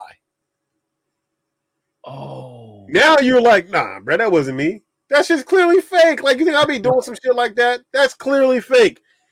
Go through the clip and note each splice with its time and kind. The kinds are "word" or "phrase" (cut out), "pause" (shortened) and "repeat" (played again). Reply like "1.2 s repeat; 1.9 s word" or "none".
none